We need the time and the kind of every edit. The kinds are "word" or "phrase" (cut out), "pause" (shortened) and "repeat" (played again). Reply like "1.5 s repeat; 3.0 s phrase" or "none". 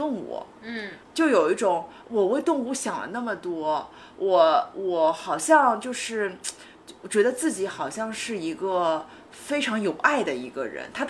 1.0 s pause